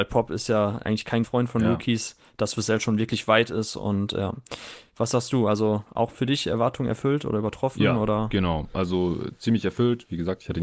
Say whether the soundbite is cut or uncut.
cut